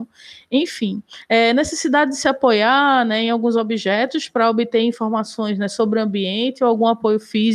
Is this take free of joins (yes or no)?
yes